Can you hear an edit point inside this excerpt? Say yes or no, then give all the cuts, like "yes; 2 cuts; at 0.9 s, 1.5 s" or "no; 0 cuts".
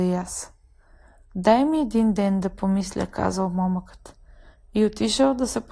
no; 0 cuts